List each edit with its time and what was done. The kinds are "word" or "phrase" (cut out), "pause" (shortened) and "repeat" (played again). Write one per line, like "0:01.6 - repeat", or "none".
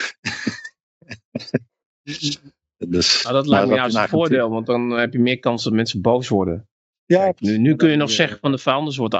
none